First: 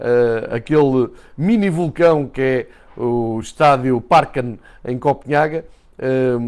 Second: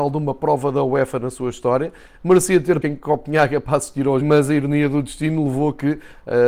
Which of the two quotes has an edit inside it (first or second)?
second